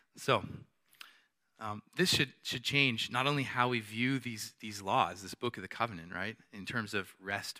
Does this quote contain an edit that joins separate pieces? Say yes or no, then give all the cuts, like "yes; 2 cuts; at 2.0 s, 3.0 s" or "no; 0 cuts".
no; 0 cuts